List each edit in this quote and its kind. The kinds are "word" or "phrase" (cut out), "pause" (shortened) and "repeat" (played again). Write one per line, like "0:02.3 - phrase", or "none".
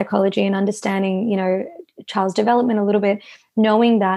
none